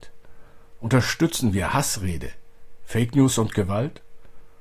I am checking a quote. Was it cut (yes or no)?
no